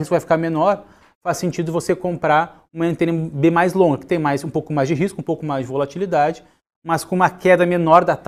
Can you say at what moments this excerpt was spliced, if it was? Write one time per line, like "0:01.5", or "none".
none